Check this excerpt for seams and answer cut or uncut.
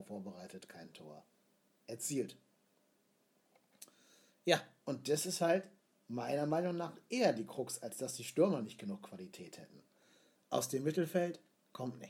uncut